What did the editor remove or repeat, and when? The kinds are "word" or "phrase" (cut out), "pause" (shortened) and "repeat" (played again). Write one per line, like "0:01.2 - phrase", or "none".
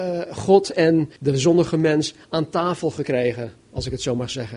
0:01.2 - pause